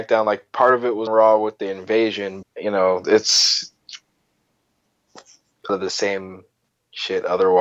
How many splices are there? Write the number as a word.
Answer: three